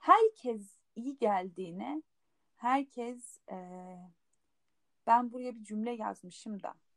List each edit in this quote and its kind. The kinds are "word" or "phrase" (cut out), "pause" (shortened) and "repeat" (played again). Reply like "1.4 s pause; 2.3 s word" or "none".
none